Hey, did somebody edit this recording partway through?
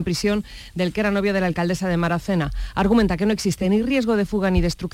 no; 0 cuts

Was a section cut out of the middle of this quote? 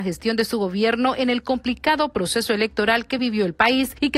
no; 0 cuts

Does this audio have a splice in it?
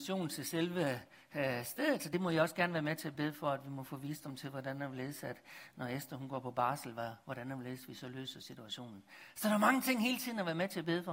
no; 0 cuts

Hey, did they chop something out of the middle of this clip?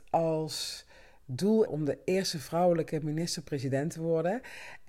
yes; 1 cut; at 1.7 s

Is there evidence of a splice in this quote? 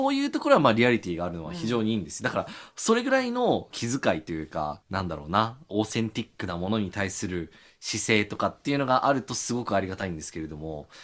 no; 0 cuts

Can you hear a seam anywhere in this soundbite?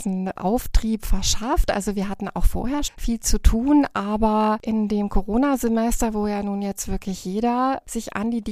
yes; 1 cut; at 2.9 s

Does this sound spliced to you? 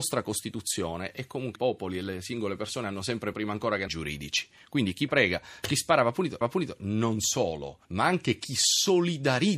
yes; 6 cuts; at 1.6 s, 3.3 s, 3.9 s, 5.1 s, 6.4 s, 7.8 s

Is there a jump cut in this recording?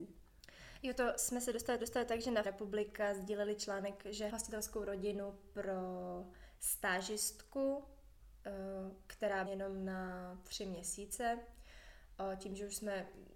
yes; 5 cuts; at 0.9 s, 1.8 s, 2.4 s, 4.3 s, 9.5 s

